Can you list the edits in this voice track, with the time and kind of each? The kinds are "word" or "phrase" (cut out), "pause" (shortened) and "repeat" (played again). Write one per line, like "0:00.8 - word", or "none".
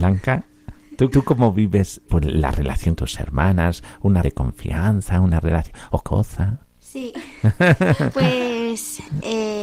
0:01.1 - word
0:02.1 - word
0:03.0 - word
0:04.2 - word
0:06.0 - word

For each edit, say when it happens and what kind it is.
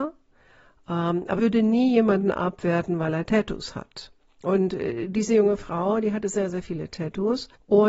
0:01.4 - word

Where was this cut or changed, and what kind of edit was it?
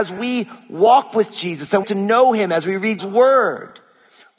0:01.8 - phrase
0:03.0 - word

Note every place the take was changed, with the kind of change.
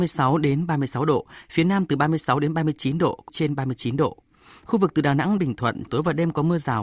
0:03.3 - word
0:05.4 - word
0:05.9 - word

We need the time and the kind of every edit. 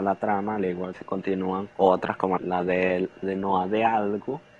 0:00.9 - word
0:01.7 - pause
0:02.4 - word
0:03.2 - phrase

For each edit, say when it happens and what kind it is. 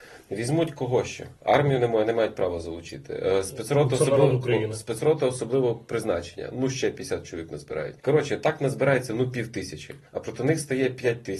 0:01.4 - pause
0:08.0 - pause
0:10.1 - pause

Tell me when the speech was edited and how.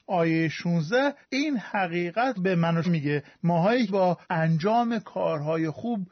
0:01.2 - pause
0:02.4 - word
0:02.8 - word
0:03.9 - word
0:04.2 - pause

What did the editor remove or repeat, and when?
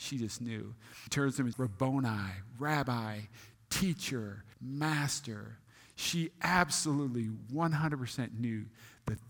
0:01.1 - word
0:01.5 - phrase
0:04.5 - pause

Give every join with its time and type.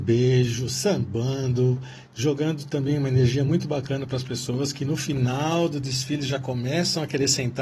none

